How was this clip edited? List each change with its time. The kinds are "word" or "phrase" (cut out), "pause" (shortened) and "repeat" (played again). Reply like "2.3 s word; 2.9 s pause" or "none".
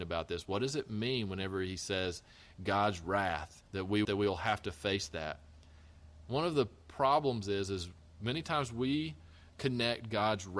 3.7 s pause; 4.0 s phrase